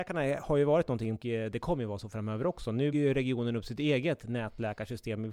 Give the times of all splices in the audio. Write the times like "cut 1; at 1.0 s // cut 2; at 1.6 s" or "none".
cut 1; at 1.2 s // cut 2; at 2.9 s